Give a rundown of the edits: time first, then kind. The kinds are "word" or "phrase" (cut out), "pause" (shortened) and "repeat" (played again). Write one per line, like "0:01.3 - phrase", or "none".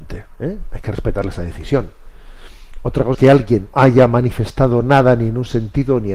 0:03.1 - word
0:03.7 - word